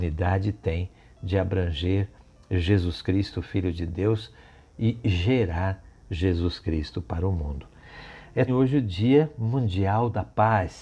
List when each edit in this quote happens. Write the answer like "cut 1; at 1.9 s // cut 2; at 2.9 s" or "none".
cut 1; at 8.5 s